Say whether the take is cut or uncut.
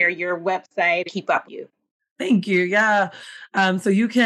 cut